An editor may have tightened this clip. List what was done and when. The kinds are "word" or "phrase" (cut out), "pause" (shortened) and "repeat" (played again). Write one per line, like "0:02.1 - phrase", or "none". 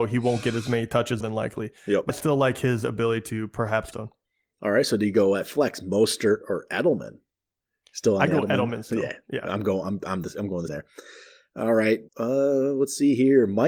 0:01.2 - phrase
0:02.1 - word
0:03.9 - phrase
0:10.7 - word
0:12.1 - pause